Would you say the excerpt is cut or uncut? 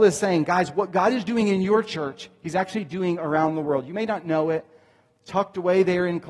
uncut